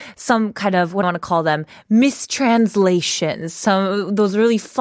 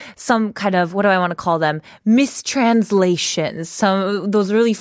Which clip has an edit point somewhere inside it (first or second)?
first